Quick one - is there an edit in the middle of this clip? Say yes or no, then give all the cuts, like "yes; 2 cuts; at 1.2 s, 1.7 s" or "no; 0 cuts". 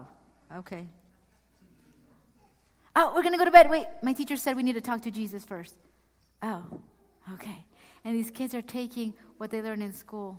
no; 0 cuts